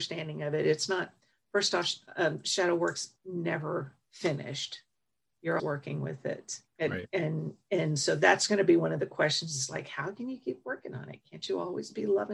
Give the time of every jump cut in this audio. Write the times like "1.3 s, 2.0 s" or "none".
5.6 s, 6.7 s